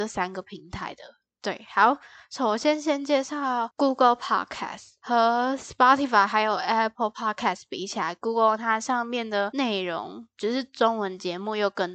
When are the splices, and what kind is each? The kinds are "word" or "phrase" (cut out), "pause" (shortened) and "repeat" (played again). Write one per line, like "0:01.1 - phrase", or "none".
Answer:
none